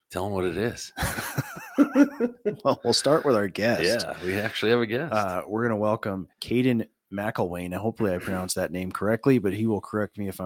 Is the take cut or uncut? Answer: cut